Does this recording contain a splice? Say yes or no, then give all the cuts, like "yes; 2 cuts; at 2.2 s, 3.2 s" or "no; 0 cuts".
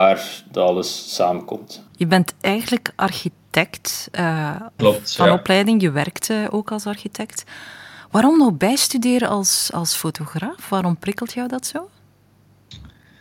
yes; 1 cut; at 4.8 s